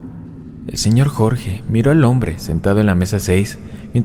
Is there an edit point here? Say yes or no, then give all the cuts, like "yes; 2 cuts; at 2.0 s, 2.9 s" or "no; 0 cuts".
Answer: no; 0 cuts